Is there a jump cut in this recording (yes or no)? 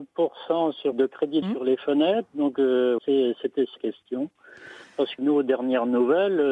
yes